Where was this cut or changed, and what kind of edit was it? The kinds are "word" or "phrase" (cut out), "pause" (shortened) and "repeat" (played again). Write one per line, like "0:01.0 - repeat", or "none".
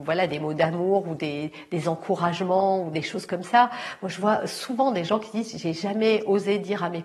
none